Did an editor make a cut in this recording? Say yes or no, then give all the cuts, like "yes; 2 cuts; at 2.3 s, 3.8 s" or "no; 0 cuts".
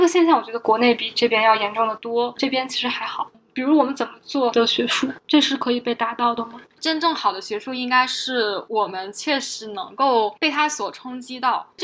yes; 1 cut; at 4.5 s